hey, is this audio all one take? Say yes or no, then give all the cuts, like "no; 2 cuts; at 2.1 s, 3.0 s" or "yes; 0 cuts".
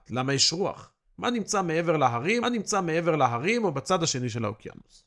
no; 1 cut; at 2.4 s